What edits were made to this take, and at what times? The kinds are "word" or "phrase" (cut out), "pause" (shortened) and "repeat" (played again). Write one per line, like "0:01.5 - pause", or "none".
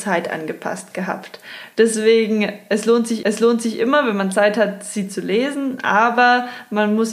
0:03.2 - repeat